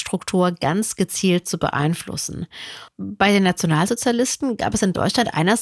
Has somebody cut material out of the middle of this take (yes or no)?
no